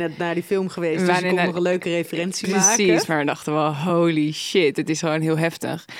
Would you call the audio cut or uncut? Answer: uncut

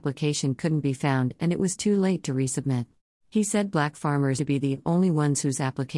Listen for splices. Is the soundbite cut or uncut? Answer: cut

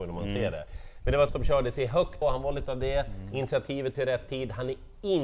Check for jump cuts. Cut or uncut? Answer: cut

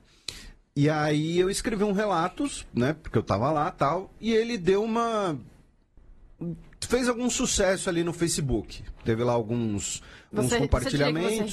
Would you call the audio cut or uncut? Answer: uncut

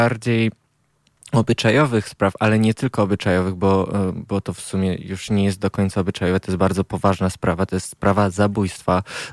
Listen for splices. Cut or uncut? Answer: uncut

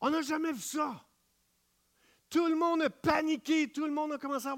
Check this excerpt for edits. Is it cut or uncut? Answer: uncut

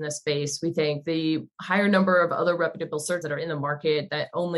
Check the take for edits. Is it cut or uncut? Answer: cut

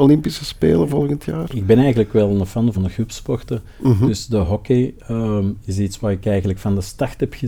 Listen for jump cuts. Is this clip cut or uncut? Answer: cut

